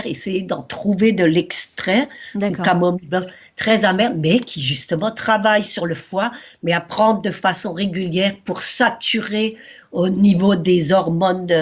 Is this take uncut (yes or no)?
yes